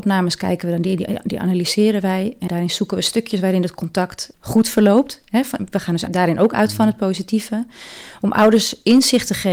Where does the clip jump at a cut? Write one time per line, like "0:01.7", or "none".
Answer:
0:02.5
0:04.3
0:06.1